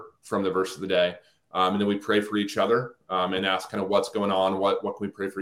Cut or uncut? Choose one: uncut